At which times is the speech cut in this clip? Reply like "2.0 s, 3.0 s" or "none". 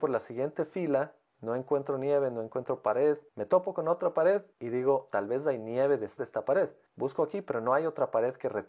3.3 s, 4.5 s, 5.1 s, 6.2 s